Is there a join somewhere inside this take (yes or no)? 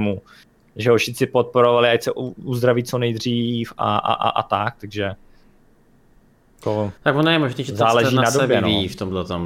yes